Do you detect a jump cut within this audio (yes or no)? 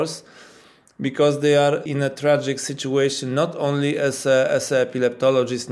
yes